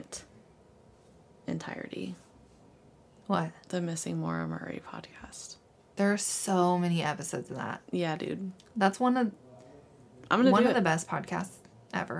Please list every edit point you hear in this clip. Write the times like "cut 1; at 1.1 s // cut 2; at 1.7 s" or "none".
none

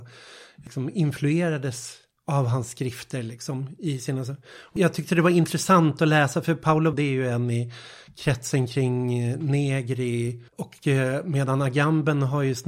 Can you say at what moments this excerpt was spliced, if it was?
cut 1; at 6.9 s // cut 2; at 10.5 s

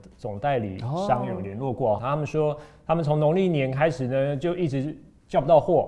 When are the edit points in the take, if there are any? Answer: cut 1; at 2.0 s

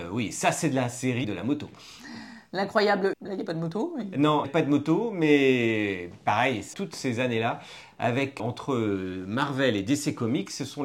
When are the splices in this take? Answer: cut 1; at 1.2 s // cut 2; at 3.1 s // cut 3; at 4.4 s // cut 4; at 6.7 s // cut 5; at 8.4 s

